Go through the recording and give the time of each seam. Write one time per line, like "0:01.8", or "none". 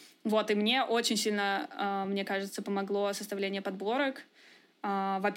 none

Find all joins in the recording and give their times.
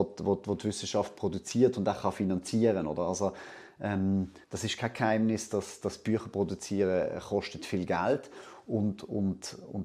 0:04.4

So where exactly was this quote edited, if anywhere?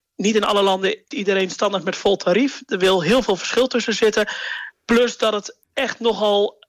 0:01.1
0:05.6

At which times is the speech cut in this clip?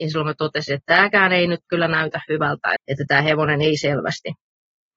0:02.8

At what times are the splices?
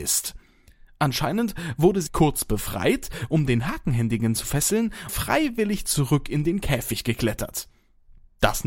0:02.1
0:05.1

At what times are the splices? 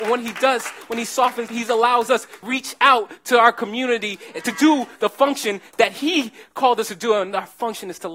0:01.5
0:02.4

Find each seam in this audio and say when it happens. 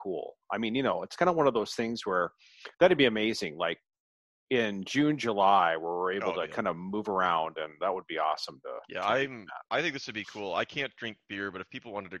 0:02.7

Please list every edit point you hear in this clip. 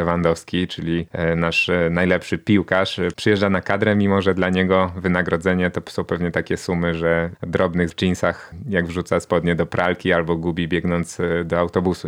0:07.3
0:07.9

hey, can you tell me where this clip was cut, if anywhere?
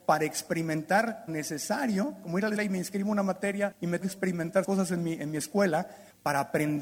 0:01.3
0:02.6
0:04.0
0:04.6

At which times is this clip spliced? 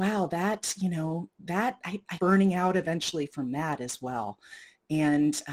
0:02.2

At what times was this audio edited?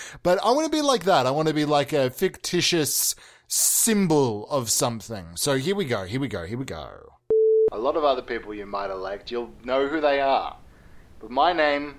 none

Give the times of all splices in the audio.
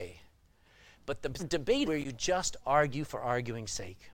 0:01.4
0:01.9

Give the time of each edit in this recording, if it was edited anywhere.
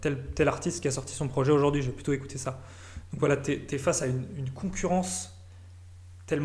none

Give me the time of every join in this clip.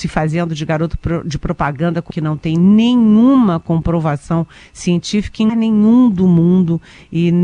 0:02.1
0:05.5

